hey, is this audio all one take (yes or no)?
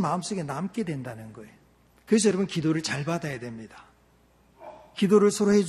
yes